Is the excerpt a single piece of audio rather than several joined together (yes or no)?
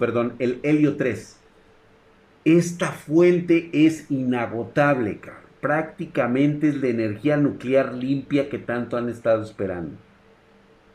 yes